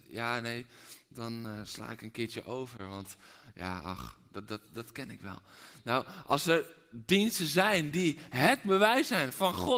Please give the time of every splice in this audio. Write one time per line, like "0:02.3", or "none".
none